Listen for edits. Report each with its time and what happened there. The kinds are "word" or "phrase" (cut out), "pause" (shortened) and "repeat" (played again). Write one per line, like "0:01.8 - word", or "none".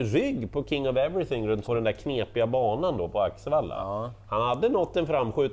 0:01.6 - word